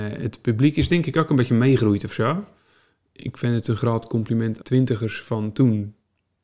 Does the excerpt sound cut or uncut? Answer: cut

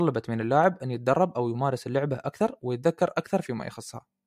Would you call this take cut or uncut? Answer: uncut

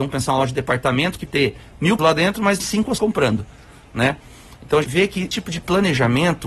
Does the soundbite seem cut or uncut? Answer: cut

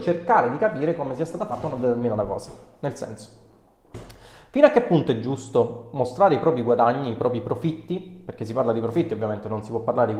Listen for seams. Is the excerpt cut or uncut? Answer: uncut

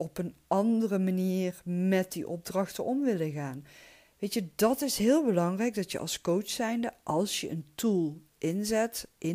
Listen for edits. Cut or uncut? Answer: uncut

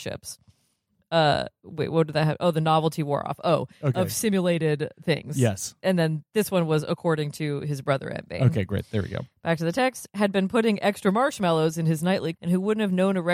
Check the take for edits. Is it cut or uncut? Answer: cut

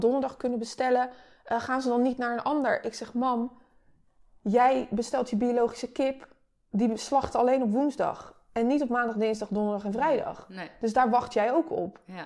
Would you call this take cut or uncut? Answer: uncut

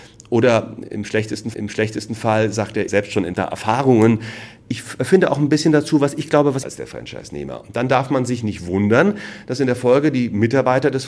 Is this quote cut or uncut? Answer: cut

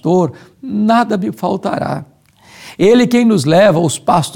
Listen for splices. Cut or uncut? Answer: uncut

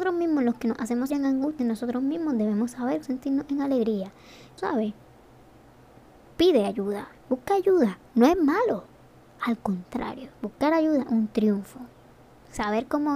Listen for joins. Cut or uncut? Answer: cut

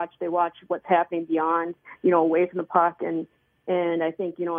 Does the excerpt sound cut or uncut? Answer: uncut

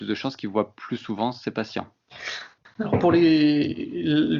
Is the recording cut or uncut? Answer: uncut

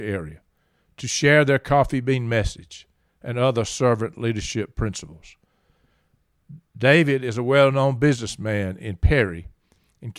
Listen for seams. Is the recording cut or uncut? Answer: uncut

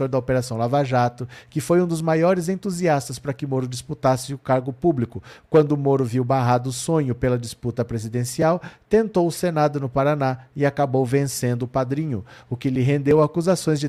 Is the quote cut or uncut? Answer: uncut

